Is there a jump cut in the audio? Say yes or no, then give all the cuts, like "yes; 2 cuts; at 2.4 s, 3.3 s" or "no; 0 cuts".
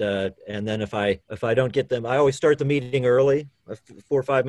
yes; 1 cut; at 1.2 s